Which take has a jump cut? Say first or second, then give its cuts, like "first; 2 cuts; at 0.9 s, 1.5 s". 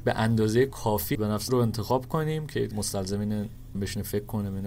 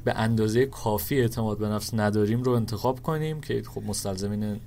first; 4 cuts; at 1.1 s, 1.5 s, 2.7 s, 3.7 s